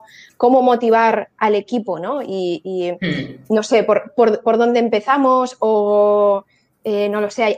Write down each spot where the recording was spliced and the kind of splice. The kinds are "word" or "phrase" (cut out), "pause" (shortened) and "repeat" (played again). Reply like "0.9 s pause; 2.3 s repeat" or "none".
none